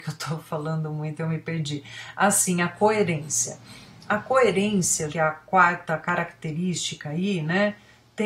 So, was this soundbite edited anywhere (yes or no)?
yes